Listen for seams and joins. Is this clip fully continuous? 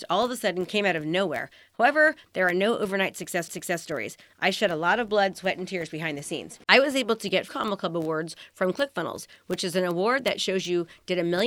no; 3 cuts; at 3.5 s, 6.6 s, 7.5 s

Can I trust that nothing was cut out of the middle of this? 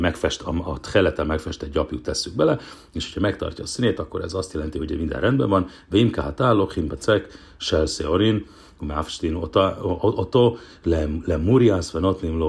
yes; 0 cuts

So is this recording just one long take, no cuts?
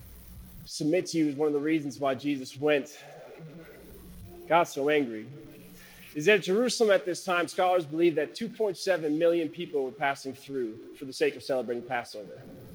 yes; 0 cuts

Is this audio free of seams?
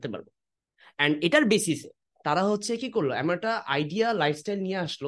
yes; 0 cuts

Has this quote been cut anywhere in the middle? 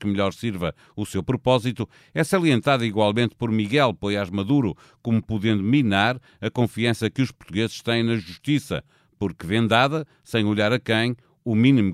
no; 0 cuts

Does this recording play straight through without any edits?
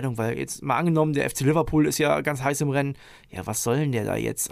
yes; 0 cuts

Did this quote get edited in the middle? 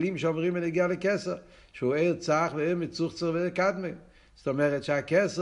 no; 0 cuts

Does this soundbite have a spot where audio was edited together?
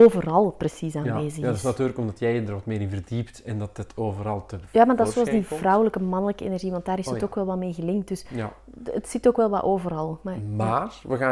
no; 0 cuts

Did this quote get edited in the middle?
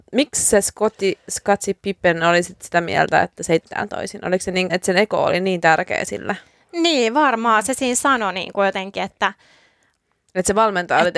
yes; 2 cuts; at 3.6 s, 4.7 s

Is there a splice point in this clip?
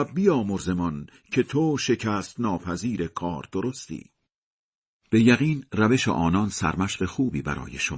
no; 0 cuts

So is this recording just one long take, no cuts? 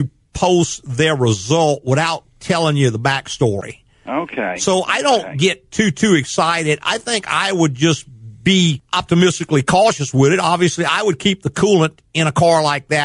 yes; 0 cuts

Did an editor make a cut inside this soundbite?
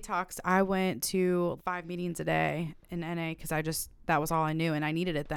yes; 1 cut; at 1.6 s

